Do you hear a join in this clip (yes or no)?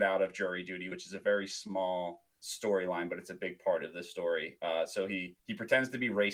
yes